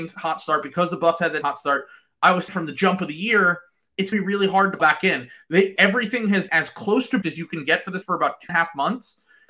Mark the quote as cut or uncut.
cut